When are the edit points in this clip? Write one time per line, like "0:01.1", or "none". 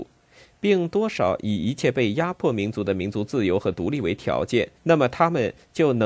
0:04.8